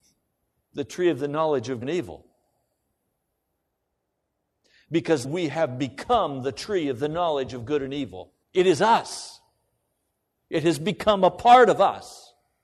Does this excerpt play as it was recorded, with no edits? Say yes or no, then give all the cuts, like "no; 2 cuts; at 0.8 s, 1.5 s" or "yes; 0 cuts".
no; 3 cuts; at 1.8 s, 5.2 s, 8.4 s